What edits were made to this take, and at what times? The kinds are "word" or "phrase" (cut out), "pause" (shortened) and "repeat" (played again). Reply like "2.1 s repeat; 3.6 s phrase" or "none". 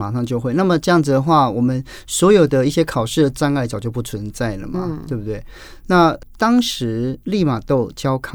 7.2 s pause